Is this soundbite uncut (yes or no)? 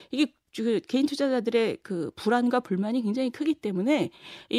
yes